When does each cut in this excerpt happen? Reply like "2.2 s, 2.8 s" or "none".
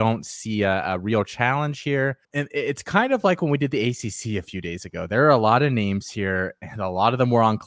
2.2 s